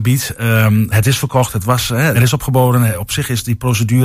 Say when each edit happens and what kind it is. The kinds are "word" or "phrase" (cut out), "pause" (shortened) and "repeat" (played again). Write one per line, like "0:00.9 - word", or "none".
0:00.9 - word
0:02.1 - word

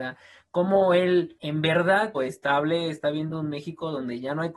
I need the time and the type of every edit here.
0:02.1 - phrase

